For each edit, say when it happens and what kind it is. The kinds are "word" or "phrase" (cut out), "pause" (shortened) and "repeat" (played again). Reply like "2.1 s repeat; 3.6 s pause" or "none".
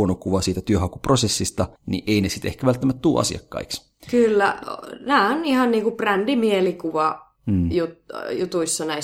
1.8 s pause; 4.0 s pause; 7.4 s pause